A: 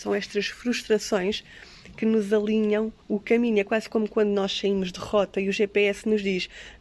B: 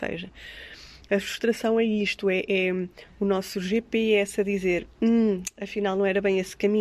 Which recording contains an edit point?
A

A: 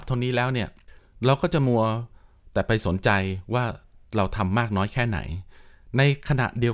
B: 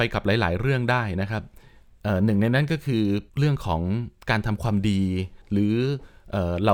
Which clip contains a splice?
B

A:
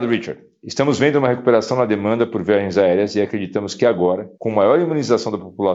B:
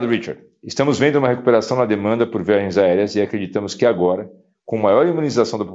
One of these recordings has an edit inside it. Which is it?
A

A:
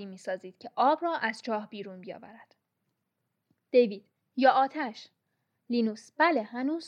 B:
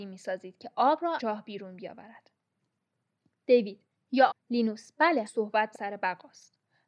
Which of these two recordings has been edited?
B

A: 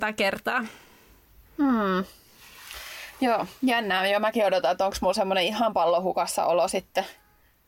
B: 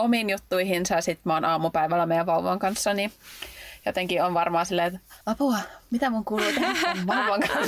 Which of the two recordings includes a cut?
B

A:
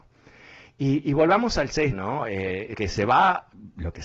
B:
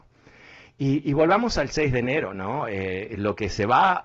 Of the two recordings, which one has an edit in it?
A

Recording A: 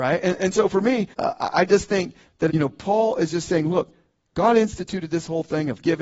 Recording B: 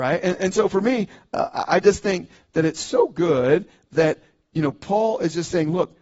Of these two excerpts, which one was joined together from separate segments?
A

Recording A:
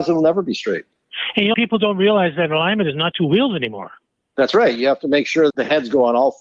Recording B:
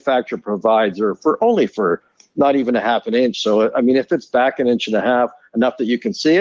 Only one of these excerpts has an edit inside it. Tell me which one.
A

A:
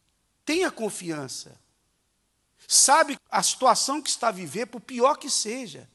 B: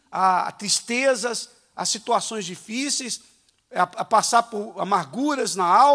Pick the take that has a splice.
A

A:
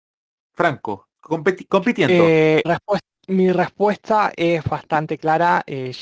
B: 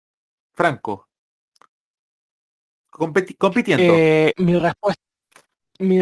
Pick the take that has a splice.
A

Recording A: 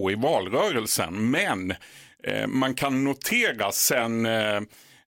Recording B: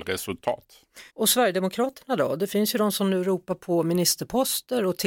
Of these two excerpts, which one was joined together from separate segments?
B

